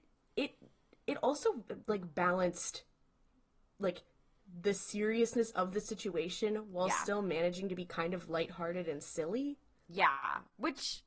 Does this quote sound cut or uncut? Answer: uncut